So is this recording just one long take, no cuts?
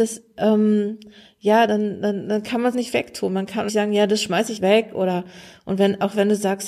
no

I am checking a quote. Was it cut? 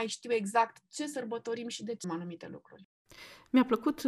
yes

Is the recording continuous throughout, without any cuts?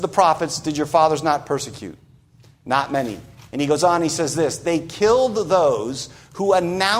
yes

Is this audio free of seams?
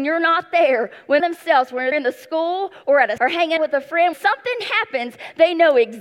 no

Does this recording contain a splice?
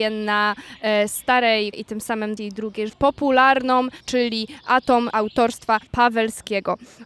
yes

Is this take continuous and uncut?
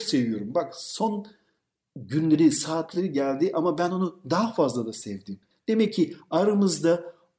yes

